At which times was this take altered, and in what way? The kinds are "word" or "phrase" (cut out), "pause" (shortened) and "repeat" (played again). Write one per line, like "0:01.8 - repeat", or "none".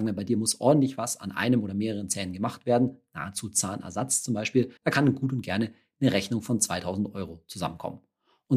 0:04.8 - pause